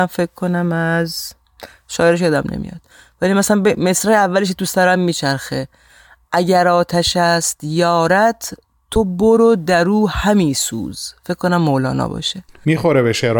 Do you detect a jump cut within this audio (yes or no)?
no